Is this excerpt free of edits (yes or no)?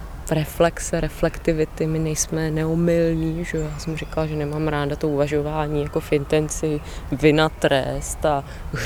yes